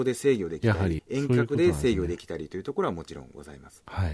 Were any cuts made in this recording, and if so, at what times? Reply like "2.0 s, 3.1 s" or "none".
1.0 s